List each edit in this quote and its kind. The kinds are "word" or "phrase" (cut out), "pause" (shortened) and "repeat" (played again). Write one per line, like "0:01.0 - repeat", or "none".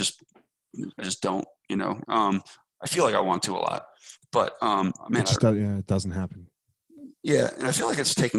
0:02.0 - word